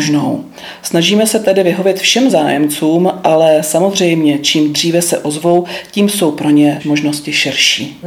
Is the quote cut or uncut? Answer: uncut